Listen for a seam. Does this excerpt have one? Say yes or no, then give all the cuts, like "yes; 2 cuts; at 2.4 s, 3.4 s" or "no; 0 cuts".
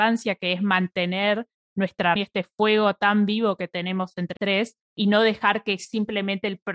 yes; 3 cuts; at 2.2 s, 4.4 s, 4.8 s